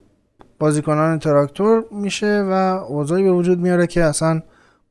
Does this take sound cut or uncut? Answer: uncut